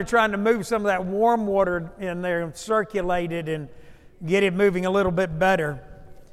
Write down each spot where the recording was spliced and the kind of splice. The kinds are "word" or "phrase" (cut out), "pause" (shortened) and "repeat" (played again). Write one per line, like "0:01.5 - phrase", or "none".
none